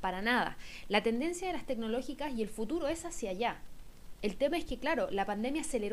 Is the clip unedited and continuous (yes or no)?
yes